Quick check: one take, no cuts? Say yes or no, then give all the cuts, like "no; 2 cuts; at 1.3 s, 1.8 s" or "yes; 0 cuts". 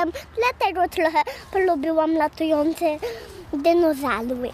yes; 0 cuts